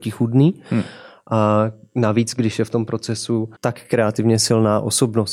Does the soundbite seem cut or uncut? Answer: cut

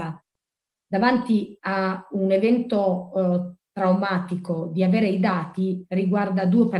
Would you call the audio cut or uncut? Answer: uncut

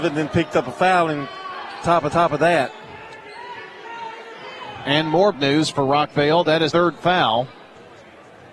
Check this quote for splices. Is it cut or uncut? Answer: cut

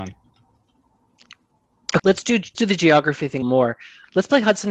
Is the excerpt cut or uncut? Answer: cut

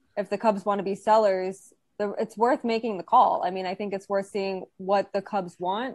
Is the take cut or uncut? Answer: uncut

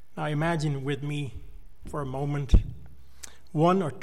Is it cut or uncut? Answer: uncut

